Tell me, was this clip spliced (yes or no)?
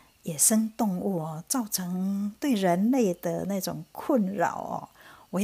no